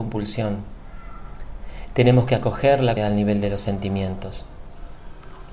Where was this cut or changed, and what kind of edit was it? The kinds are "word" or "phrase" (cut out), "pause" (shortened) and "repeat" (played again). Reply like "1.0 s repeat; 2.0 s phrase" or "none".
3.0 s word